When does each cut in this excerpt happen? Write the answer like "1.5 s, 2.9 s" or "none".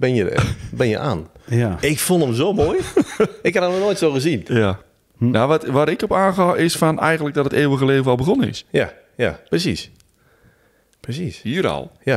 none